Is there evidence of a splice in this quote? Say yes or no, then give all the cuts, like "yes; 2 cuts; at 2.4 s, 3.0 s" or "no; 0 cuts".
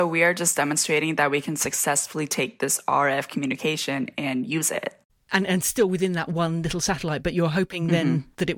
no; 0 cuts